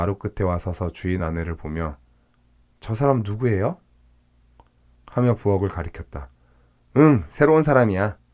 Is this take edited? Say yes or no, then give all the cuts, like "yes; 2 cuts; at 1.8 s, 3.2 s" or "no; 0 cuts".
no; 0 cuts